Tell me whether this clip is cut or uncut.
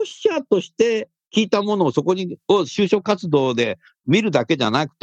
uncut